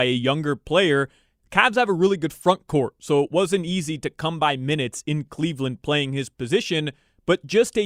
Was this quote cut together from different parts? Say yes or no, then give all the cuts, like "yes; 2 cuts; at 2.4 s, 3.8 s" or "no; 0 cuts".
no; 0 cuts